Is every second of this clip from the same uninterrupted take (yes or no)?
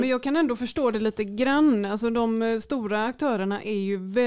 yes